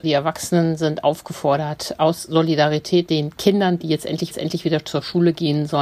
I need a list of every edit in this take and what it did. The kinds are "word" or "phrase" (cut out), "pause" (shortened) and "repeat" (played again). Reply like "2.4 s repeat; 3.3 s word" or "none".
3.1 s word; 4.3 s repeat